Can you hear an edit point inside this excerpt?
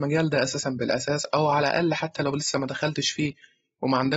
no; 0 cuts

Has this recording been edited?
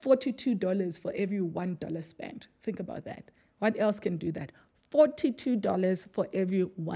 no; 0 cuts

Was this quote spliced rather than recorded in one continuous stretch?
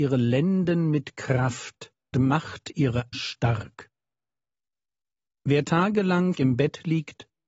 yes; 3 cuts; at 2.1 s, 3.1 s, 6.3 s

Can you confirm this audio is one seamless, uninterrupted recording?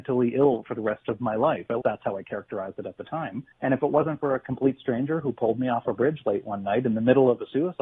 no; 2 cuts; at 1.8 s, 3.5 s

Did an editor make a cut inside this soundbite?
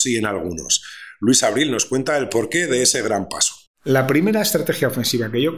no; 0 cuts

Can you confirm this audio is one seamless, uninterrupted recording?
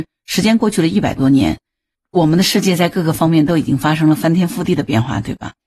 yes; 0 cuts

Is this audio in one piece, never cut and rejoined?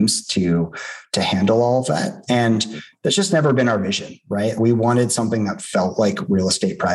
no; 1 cut; at 4.6 s

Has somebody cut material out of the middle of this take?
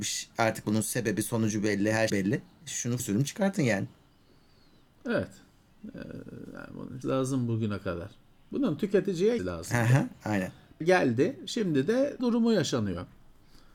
yes; 6 cuts; at 2.1 s, 3.0 s, 7.0 s, 9.4 s, 10.8 s, 12.2 s

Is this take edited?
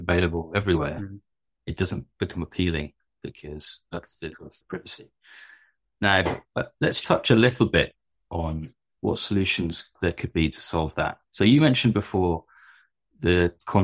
yes; 2 cuts; at 4.3 s, 7.0 s

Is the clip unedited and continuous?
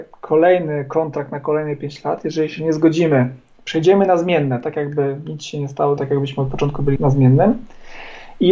no; 2 cuts; at 6.0 s, 7.0 s

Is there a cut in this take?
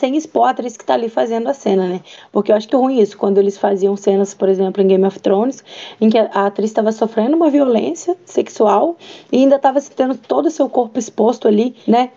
yes; 1 cut; at 2.7 s

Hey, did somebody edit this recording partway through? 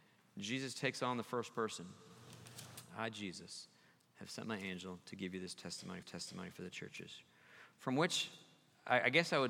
yes; 1 cut; at 6.0 s

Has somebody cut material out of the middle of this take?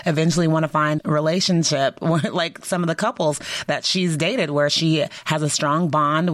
yes; 2 cuts; at 1.0 s, 2.6 s

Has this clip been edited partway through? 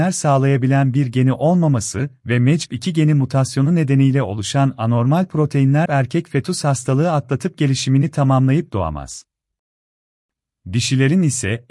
yes; 1 cut; at 5.9 s

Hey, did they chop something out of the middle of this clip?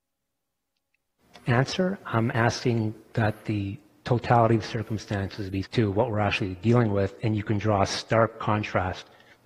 yes; 1 cut; at 5.6 s

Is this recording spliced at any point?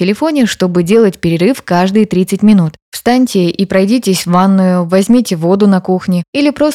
no; 0 cuts

